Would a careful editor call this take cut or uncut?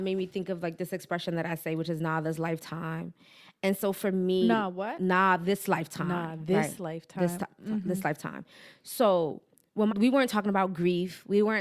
cut